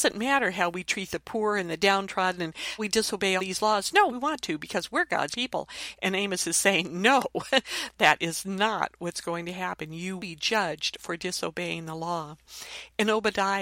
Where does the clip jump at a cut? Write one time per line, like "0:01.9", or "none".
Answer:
0:02.8
0:03.4
0:04.1
0:05.3
0:10.2